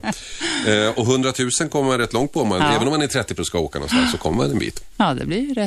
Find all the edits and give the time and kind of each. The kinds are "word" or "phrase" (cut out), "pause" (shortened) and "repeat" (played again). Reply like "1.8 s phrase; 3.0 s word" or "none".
3.4 s word